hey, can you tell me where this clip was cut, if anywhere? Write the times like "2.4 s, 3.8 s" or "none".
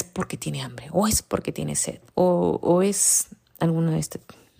2.1 s